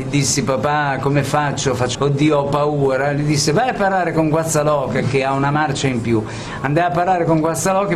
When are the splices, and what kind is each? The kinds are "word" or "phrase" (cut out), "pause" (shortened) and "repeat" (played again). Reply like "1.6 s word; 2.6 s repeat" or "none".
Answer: 1.9 s phrase